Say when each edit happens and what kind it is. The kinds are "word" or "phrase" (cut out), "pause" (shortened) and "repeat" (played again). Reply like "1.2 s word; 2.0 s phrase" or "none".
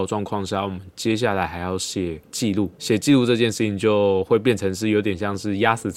2.2 s pause; 2.7 s pause